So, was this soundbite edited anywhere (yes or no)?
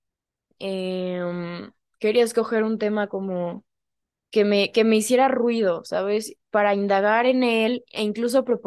no